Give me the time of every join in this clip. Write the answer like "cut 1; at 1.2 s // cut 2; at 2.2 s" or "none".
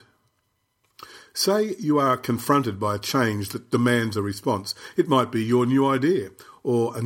none